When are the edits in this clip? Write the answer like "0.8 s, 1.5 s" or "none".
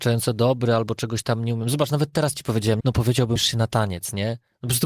2.8 s, 3.4 s